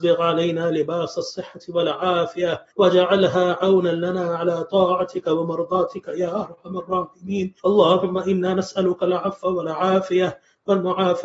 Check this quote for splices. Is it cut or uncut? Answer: cut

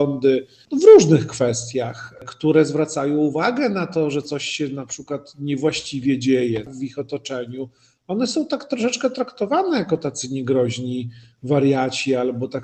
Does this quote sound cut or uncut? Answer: uncut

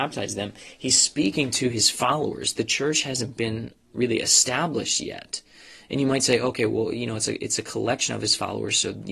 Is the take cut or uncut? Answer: uncut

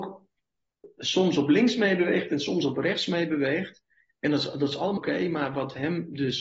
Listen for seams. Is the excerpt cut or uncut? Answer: cut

